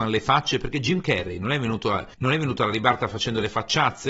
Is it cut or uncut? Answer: cut